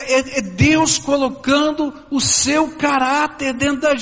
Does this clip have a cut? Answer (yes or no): no